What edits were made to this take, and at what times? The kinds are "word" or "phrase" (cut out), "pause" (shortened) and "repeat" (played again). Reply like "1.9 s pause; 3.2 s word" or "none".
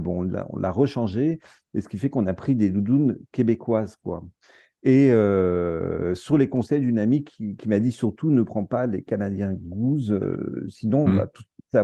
none